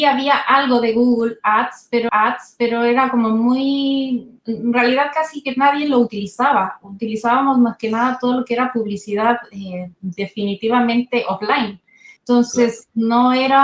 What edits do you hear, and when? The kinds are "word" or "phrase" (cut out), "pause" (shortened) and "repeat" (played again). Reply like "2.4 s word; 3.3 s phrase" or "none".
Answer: 2.1 s repeat; 4.4 s pause; 12.2 s pause